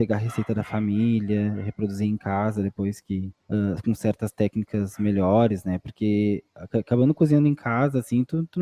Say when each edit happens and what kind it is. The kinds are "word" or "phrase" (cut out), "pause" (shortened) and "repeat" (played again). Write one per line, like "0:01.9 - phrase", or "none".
0:03.4 - pause

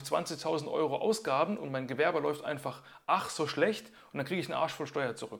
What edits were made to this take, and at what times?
none

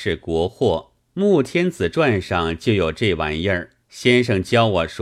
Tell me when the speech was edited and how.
0:01.0 - pause
0:03.8 - pause

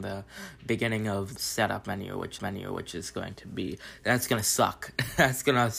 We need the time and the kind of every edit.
0:01.4 - word
0:02.4 - repeat

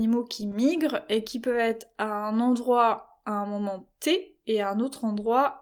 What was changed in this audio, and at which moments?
none

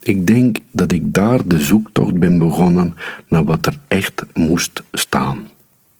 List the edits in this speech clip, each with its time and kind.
none

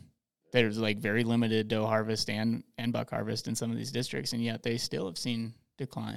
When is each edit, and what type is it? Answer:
none

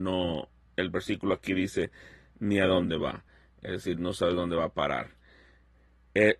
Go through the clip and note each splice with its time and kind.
none

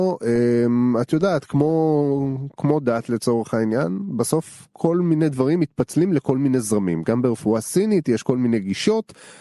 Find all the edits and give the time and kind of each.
none

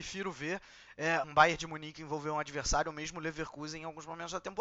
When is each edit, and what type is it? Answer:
0:01.2 - word

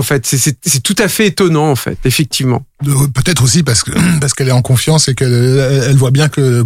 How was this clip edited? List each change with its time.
none

